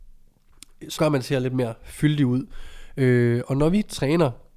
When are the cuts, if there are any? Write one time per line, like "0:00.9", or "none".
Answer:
0:01.0